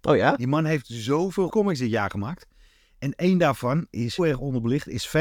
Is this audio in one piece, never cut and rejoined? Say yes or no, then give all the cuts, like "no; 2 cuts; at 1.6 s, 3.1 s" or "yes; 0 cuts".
no; 2 cuts; at 1.5 s, 4.2 s